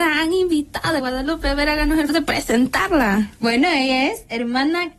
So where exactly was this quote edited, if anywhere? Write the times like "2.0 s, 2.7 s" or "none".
1.0 s, 2.1 s